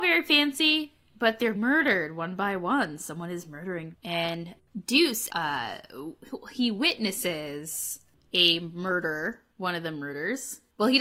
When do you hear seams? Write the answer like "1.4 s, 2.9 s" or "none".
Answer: 1.5 s, 3.9 s, 5.3 s